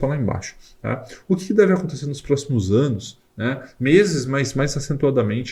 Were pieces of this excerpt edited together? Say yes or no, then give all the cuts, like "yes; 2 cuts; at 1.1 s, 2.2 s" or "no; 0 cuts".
no; 0 cuts